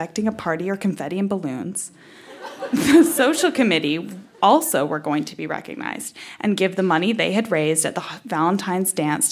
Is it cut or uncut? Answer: uncut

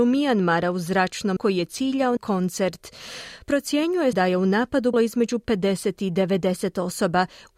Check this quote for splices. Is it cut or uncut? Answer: cut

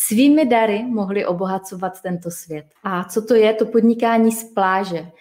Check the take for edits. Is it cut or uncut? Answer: cut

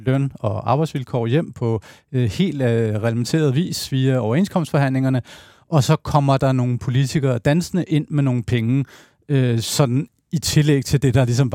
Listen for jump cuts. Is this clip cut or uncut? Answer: uncut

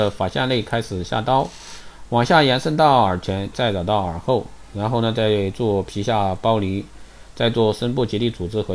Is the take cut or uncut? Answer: cut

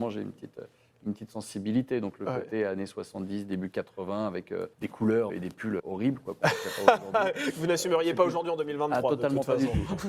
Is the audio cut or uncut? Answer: cut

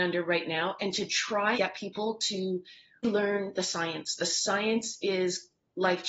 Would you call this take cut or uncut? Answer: cut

